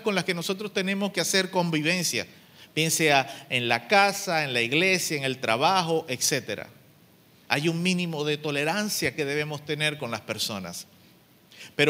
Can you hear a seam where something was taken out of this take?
no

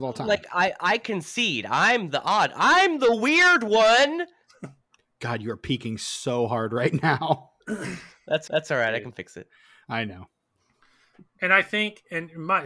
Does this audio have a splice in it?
yes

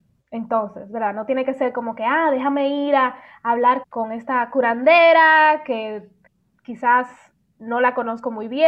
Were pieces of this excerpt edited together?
yes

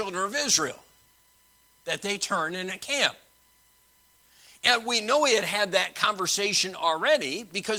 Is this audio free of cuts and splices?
yes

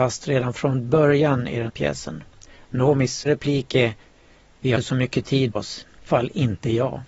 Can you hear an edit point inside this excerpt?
yes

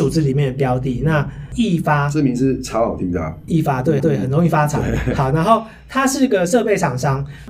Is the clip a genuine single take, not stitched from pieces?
no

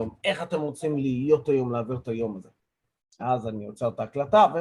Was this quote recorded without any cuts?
yes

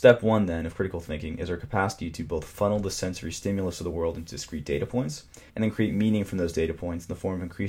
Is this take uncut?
no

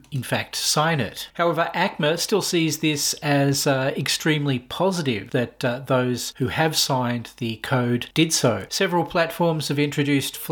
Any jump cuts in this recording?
no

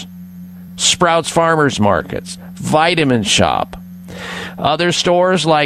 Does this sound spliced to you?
no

